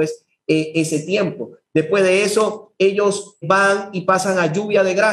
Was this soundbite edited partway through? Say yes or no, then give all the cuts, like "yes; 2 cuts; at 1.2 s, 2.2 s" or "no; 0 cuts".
yes; 1 cut; at 3.4 s